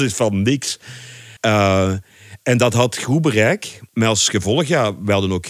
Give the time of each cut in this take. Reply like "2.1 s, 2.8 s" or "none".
1.4 s, 3.9 s